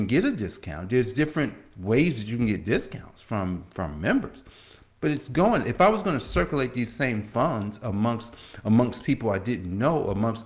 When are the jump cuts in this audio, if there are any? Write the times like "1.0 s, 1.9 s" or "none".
none